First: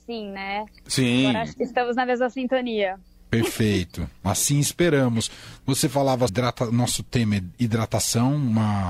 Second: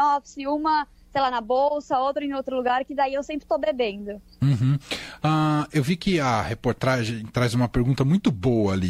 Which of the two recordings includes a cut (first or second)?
first